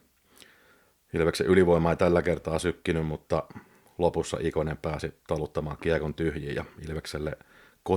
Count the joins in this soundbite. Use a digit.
0